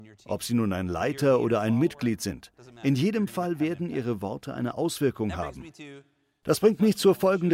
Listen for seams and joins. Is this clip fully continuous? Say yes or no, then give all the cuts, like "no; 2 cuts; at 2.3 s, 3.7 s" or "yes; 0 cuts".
yes; 0 cuts